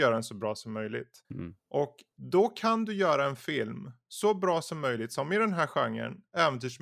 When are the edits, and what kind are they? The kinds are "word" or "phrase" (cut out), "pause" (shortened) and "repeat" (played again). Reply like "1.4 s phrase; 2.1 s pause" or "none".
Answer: 1.2 s pause